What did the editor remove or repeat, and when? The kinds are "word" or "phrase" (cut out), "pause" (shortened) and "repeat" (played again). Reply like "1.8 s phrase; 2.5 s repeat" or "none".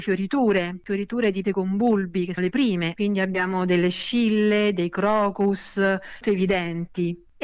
1.4 s word; 2.4 s word; 3.0 s phrase; 6.2 s phrase